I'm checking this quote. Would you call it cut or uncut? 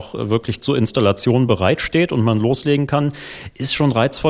uncut